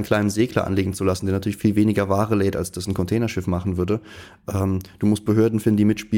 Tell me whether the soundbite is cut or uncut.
uncut